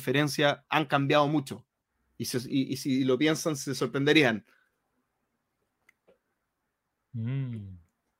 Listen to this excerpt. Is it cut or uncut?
uncut